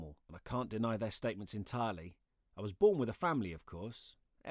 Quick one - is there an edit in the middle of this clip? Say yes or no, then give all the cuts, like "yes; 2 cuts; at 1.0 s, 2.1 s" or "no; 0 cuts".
no; 0 cuts